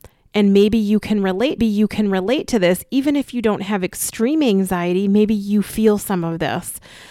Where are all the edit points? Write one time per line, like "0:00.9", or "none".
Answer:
0:01.6